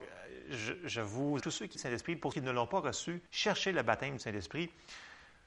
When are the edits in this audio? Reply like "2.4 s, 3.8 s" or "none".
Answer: 1.4 s, 1.7 s, 2.3 s, 3.3 s